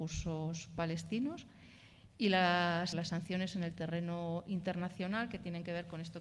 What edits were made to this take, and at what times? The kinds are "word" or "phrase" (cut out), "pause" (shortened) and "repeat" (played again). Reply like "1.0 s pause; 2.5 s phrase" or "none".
2.9 s word